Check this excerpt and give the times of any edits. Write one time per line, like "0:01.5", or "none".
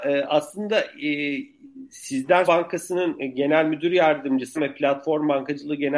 0:02.5
0:04.6